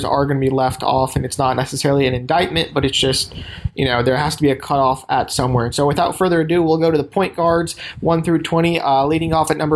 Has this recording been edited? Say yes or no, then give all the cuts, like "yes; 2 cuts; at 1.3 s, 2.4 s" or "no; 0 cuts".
no; 0 cuts